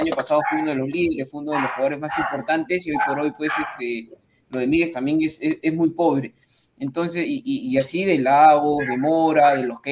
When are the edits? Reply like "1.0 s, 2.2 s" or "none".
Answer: none